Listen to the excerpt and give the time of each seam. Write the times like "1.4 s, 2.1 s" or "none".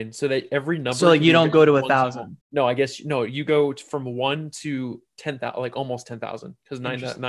2.4 s, 5.1 s